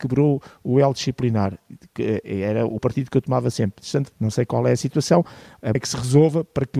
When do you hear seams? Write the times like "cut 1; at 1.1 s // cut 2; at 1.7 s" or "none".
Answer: cut 1; at 2.8 s // cut 2; at 4.1 s // cut 3; at 5.7 s